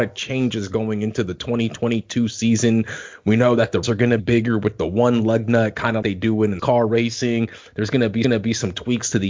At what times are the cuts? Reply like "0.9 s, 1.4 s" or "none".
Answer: 3.8 s, 4.2 s, 6.0 s, 6.6 s, 8.2 s